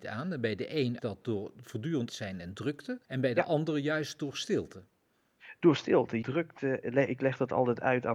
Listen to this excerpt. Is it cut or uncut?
cut